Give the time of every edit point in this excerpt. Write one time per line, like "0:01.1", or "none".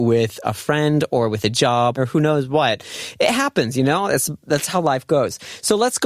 0:02.0